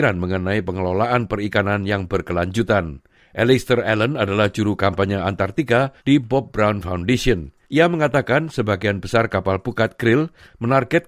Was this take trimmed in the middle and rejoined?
yes; 3 cuts; at 3.2 s, 6.0 s, 7.6 s

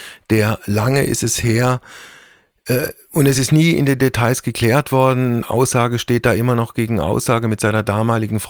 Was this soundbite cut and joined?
no; 0 cuts

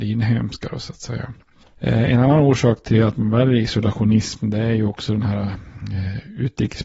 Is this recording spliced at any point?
no; 0 cuts

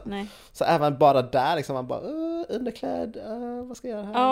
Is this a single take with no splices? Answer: yes; 0 cuts

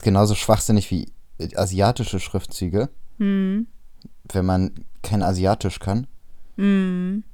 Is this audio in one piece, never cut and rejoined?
yes; 0 cuts

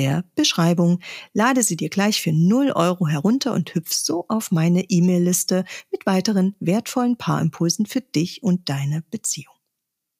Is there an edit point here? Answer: no; 0 cuts

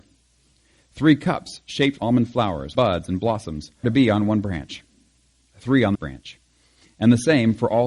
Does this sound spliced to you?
yes; 4 cuts; at 2.0 s, 2.7 s, 3.8 s, 5.9 s

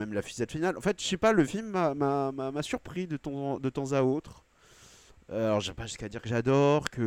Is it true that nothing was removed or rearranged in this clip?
yes; 0 cuts

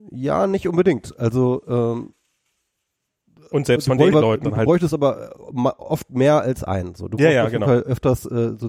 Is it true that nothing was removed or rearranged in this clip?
no; 2 cuts; at 4.1 s, 4.4 s

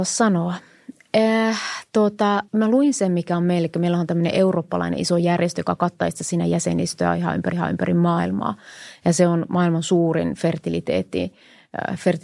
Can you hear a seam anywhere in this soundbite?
yes; 2 cuts; at 2.5 s, 7.5 s

